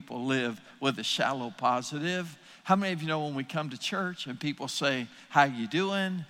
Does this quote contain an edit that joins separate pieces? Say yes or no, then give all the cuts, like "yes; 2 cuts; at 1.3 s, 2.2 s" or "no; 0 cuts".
no; 0 cuts